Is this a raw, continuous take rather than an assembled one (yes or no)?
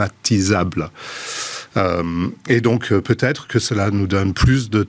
yes